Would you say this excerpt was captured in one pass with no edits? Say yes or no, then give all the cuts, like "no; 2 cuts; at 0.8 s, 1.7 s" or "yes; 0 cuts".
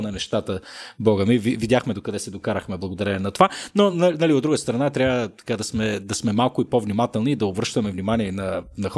yes; 0 cuts